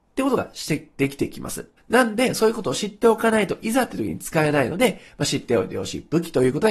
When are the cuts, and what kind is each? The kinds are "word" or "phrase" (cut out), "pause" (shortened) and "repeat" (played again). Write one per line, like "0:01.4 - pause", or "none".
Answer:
0:01.8 - pause